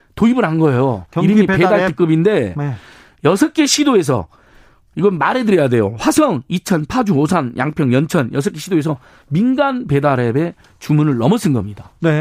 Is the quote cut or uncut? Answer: uncut